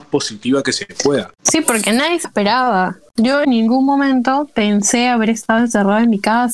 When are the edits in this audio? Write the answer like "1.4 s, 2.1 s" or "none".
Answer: 2.2 s, 3.4 s

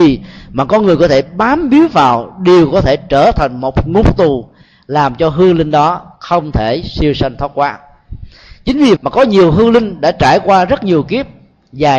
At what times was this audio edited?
6.2 s, 9.0 s

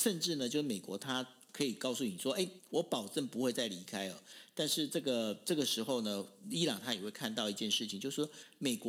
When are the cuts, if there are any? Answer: none

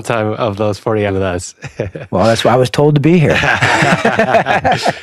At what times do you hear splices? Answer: 1.1 s

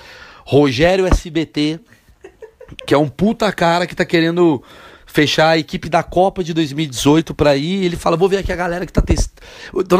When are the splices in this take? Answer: none

